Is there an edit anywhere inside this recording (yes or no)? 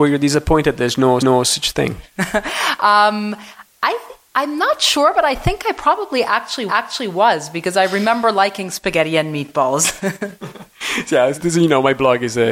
yes